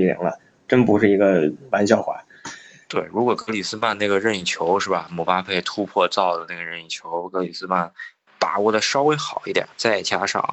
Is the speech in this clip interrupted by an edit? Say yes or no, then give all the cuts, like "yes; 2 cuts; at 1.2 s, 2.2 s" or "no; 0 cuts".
no; 0 cuts